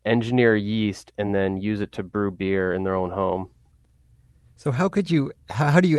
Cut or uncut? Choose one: uncut